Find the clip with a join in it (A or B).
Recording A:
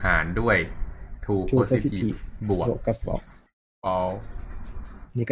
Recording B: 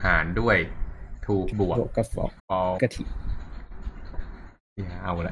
B